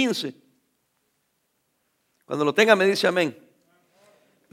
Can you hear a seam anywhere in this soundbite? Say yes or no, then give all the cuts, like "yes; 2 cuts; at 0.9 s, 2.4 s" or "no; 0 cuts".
no; 0 cuts